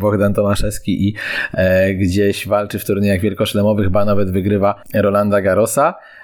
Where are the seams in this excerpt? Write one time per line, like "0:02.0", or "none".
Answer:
0:04.8